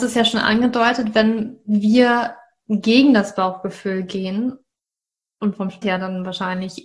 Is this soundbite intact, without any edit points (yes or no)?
no